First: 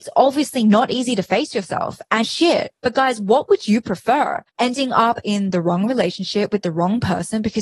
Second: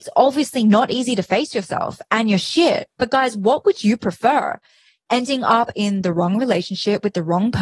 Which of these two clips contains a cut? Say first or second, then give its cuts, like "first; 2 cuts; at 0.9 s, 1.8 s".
first; 2 cuts; at 2.2 s, 4.5 s